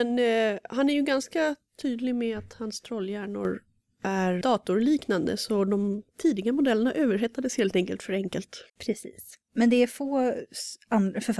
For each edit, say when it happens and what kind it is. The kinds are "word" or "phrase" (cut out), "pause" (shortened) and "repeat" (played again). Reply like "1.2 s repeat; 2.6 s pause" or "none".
4.4 s word; 6.1 s pause; 8.7 s pause